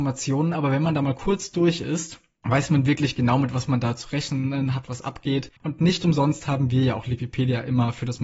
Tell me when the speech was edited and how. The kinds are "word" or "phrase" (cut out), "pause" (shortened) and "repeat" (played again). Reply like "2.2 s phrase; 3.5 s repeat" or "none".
5.6 s pause